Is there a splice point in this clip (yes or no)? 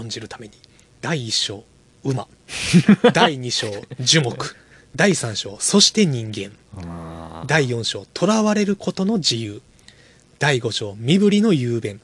no